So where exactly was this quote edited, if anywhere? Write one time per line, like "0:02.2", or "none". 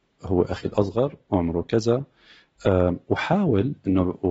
none